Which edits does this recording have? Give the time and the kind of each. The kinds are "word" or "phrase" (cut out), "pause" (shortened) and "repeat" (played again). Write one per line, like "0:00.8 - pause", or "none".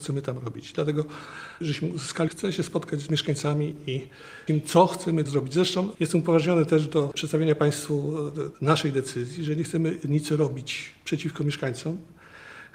0:01.6 - phrase
0:02.3 - phrase
0:04.5 - word
0:05.3 - phrase
0:08.5 - pause